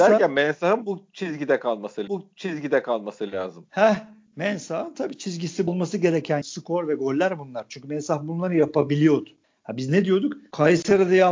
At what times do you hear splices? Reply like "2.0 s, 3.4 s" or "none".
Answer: 2.1 s, 5.7 s, 6.4 s